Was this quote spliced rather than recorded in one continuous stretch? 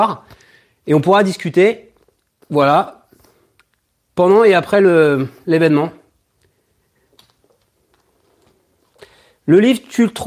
no; 0 cuts

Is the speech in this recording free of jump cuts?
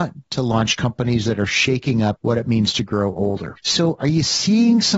yes; 0 cuts

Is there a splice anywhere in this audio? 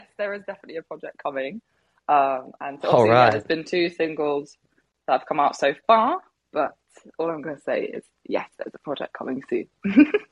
no; 0 cuts

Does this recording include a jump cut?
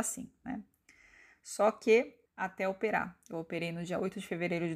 yes; 1 cut; at 2.3 s

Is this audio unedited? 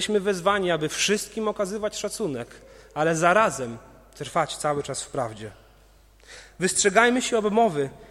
yes; 0 cuts

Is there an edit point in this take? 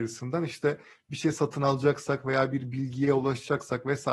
no; 0 cuts

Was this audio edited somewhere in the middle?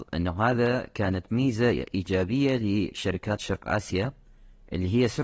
no; 0 cuts

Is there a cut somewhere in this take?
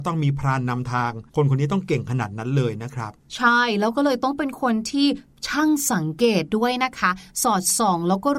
yes; 1 cut; at 1.3 s

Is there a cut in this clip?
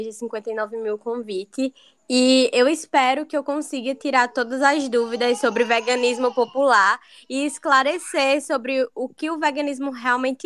no; 0 cuts

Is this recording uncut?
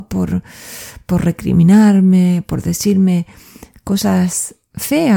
yes; 0 cuts

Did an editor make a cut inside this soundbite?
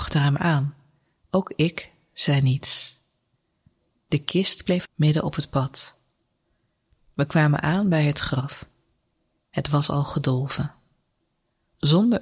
yes; 1 cut; at 4.9 s

